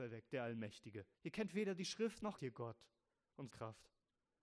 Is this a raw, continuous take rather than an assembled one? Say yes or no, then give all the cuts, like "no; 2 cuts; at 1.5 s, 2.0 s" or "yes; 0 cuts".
no; 3 cuts; at 1.1 s, 2.4 s, 3.5 s